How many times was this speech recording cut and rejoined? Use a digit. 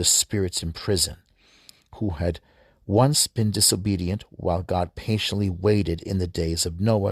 0